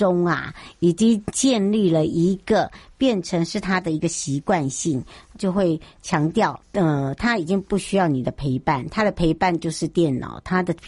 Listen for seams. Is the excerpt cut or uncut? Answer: cut